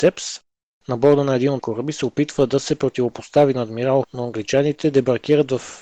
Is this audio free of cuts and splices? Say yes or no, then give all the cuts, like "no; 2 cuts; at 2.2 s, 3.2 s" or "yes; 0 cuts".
no; 2 cuts; at 1.6 s, 4.0 s